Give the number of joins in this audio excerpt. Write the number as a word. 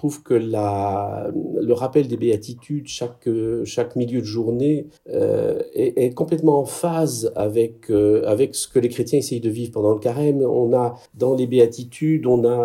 two